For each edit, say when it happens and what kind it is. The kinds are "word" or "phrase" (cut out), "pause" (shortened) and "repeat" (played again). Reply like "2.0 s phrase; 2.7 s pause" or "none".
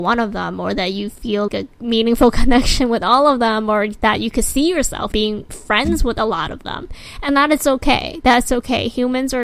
1.5 s word; 5.1 s word